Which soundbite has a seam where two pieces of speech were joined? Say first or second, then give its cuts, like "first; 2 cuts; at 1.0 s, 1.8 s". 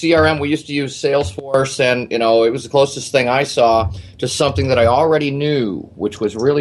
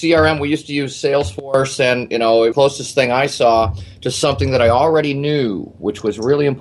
second; 1 cut; at 2.5 s